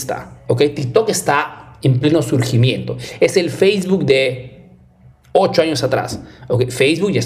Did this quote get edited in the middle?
no; 0 cuts

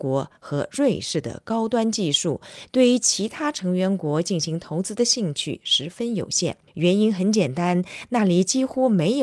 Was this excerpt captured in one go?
no; 1 cut; at 6.7 s

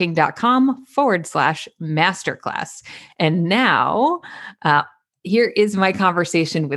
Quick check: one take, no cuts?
yes; 0 cuts

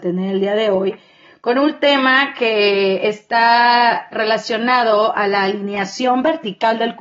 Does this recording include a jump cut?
no; 0 cuts

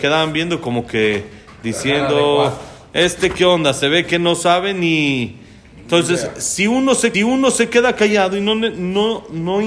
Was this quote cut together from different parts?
yes; 1 cut; at 7.1 s

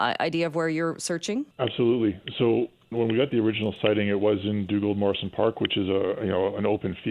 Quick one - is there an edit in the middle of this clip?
yes; 2 cuts; at 1.5 s, 2.9 s

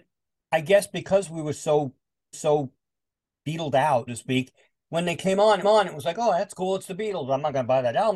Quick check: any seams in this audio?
yes; 3 cuts; at 2.3 s, 4.1 s, 5.6 s

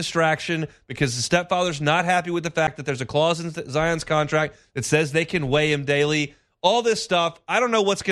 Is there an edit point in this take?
no; 0 cuts

